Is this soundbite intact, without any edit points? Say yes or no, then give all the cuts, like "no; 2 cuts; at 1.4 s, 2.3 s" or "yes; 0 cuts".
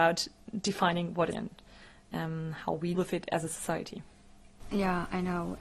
no; 2 cuts; at 1.3 s, 2.9 s